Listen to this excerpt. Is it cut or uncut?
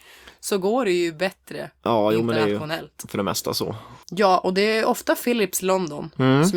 cut